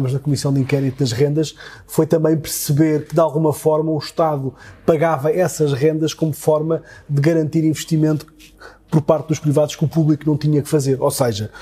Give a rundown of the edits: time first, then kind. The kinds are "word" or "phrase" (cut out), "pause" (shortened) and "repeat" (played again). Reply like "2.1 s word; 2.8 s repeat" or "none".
none